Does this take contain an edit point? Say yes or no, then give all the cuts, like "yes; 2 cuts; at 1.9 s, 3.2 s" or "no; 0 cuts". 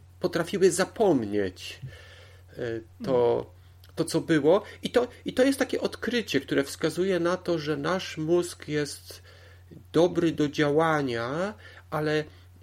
no; 0 cuts